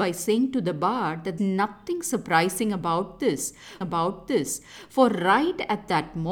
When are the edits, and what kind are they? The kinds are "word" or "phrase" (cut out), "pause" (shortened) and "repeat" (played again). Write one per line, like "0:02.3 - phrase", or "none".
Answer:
0:01.4 - word
0:03.8 - repeat